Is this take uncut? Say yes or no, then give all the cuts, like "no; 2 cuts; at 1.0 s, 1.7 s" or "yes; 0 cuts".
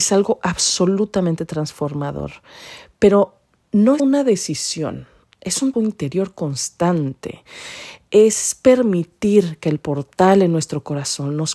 no; 2 cuts; at 4.0 s, 5.7 s